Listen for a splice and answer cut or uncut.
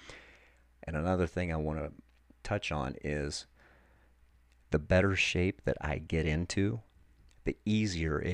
uncut